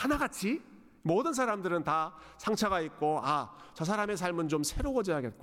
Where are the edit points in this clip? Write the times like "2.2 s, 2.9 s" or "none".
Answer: 3.2 s